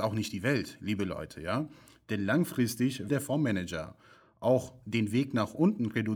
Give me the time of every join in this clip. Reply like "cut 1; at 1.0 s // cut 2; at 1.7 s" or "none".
cut 1; at 3.1 s